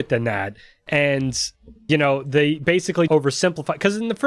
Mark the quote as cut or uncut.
cut